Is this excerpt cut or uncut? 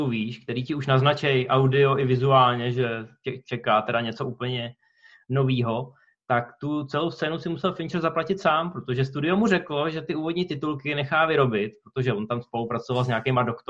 uncut